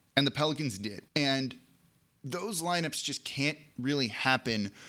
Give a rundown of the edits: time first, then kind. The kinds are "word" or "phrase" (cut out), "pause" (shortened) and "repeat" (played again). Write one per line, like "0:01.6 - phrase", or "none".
0:01.1 - pause